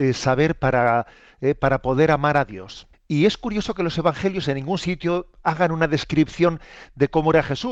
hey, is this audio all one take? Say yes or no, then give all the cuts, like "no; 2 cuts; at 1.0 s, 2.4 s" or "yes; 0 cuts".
no; 1 cut; at 2.9 s